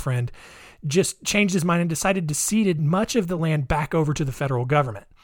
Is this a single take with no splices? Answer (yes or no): yes